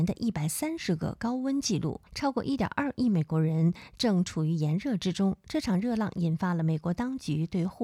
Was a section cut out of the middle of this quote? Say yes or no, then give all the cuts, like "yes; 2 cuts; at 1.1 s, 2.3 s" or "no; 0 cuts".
yes; 1 cut; at 2.1 s